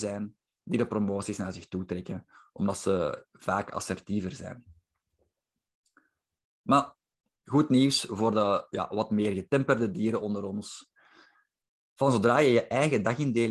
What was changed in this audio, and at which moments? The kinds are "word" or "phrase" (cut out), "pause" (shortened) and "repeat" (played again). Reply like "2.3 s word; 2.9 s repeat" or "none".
none